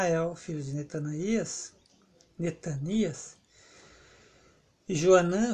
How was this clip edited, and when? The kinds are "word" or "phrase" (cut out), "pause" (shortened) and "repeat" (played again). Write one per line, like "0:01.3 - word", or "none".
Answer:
none

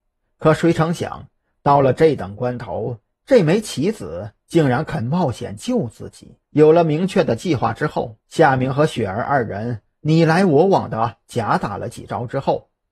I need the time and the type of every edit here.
0:06.4 - pause
0:08.2 - pause

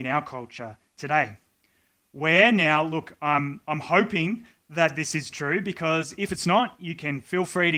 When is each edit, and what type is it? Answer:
none

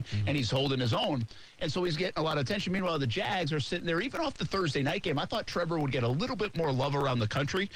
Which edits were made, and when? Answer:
none

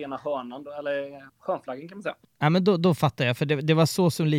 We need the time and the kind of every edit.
0:01.3 - pause

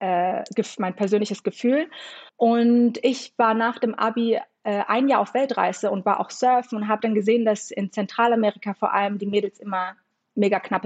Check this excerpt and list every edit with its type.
0:02.3 - pause

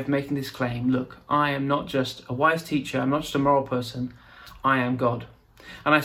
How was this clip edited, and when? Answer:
none

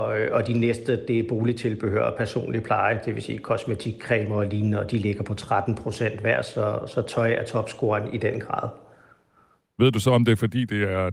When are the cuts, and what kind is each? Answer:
none

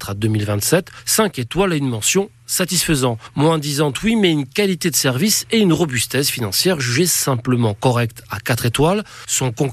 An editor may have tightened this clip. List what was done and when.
none

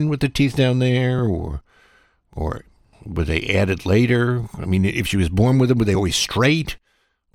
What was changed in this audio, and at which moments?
none

